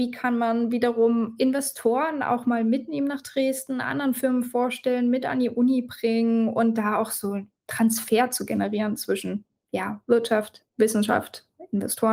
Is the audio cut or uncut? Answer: cut